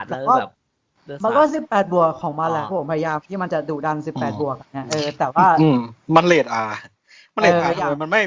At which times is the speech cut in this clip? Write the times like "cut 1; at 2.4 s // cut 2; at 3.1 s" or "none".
cut 1; at 4.6 s